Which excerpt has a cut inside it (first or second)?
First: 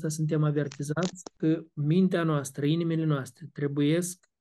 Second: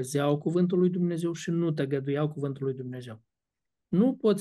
first